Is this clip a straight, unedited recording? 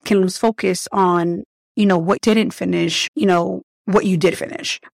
no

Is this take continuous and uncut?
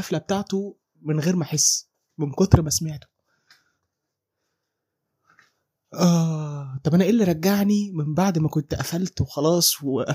yes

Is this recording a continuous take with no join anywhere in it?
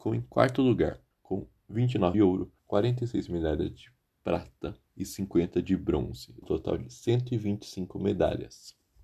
no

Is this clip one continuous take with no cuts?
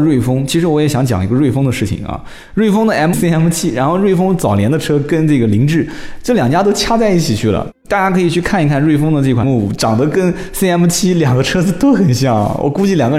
no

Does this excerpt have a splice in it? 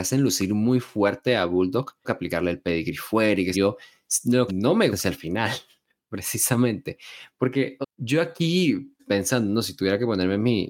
yes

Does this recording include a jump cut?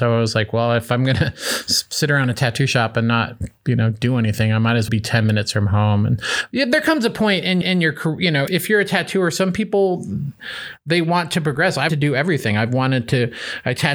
yes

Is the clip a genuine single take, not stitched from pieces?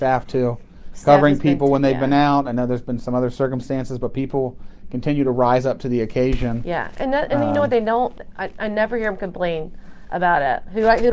yes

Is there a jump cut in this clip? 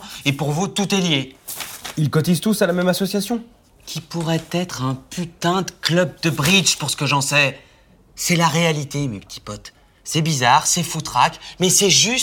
no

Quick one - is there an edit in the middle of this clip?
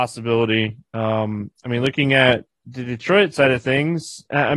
no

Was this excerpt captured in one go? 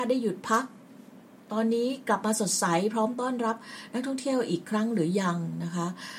yes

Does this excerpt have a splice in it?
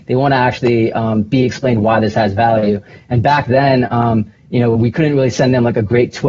no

